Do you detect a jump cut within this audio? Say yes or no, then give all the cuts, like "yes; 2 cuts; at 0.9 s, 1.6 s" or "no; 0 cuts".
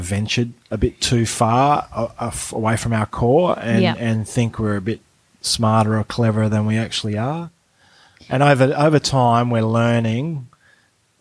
no; 0 cuts